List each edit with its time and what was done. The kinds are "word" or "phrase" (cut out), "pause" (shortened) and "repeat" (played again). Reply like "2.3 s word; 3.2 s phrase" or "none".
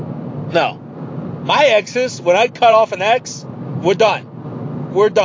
none